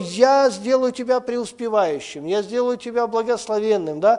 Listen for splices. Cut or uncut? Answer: uncut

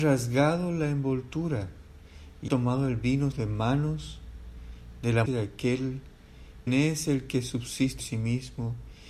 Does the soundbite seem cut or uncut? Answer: cut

